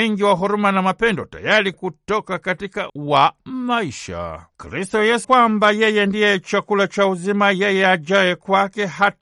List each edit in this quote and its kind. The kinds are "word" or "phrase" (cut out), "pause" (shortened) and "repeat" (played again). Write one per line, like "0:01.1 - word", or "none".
0:01.7 - phrase
0:02.9 - word
0:05.2 - word